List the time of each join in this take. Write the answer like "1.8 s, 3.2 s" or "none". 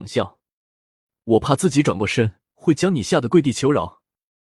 2.5 s